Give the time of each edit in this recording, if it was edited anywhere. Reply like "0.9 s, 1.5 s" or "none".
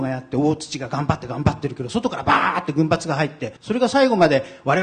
3.6 s